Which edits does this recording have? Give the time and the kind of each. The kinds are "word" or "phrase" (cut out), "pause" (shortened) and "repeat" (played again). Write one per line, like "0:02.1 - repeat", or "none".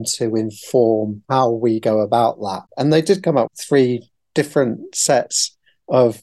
0:01.2 - pause
0:02.7 - pause
0:03.5 - word